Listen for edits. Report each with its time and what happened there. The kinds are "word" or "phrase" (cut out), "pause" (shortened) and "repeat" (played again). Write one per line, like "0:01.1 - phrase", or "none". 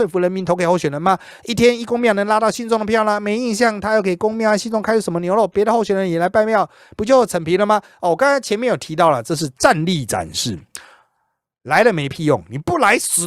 none